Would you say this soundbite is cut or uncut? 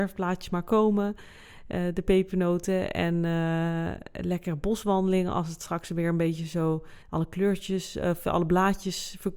cut